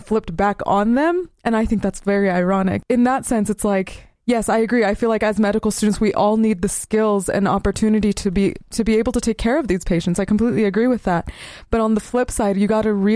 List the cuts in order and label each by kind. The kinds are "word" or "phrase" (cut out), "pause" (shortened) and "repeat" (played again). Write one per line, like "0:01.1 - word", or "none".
0:04.1 - pause

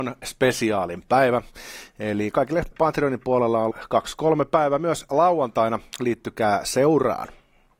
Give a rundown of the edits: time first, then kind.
0:02.7 - phrase
0:03.7 - word

